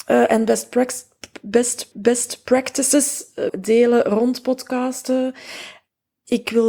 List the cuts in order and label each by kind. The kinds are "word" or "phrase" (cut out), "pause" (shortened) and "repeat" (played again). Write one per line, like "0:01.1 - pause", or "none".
0:01.9 - repeat
0:03.5 - phrase